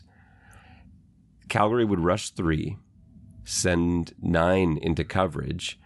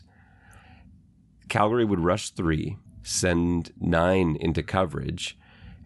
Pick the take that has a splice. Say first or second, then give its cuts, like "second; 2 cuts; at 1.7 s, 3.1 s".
second; 1 cut; at 2.9 s